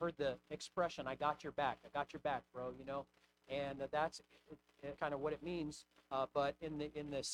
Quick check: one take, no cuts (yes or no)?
no